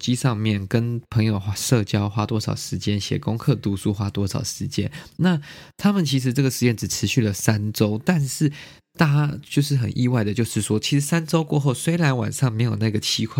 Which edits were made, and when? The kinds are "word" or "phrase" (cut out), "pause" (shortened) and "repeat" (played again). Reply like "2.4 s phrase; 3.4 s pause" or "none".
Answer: none